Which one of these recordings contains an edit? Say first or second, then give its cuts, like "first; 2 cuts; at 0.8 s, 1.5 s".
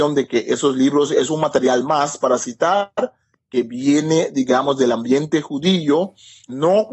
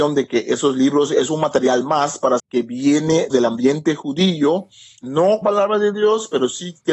second; 3 cuts; at 2.4 s, 3.3 s, 5.4 s